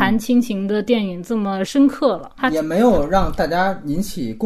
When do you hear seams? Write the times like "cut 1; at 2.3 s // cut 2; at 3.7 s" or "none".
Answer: cut 1; at 2.4 s

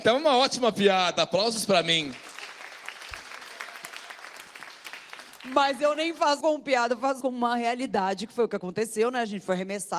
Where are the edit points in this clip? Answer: cut 1; at 6.4 s // cut 2; at 7.2 s

